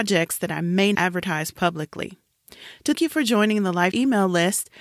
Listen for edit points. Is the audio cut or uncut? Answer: cut